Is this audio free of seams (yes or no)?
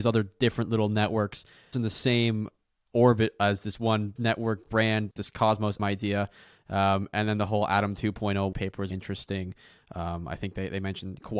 no